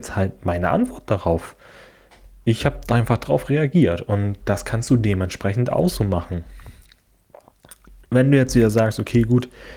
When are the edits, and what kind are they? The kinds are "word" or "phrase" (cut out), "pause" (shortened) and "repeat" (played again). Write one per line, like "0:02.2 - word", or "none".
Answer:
none